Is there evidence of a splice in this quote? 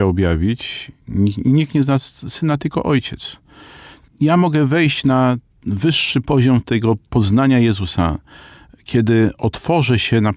no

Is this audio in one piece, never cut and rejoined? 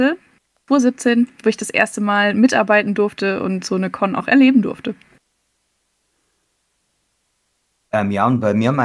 yes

